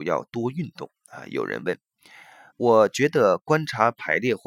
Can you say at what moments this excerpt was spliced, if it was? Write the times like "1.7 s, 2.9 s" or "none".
2.5 s